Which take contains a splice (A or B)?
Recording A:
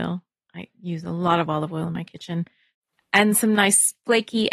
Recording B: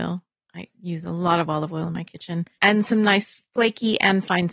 B